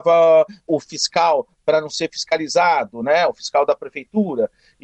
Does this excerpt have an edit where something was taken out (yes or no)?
no